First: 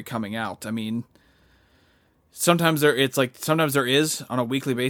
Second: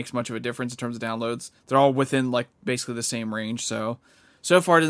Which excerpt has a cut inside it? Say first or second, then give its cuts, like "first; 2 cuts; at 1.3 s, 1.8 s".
second; 1 cut; at 1.6 s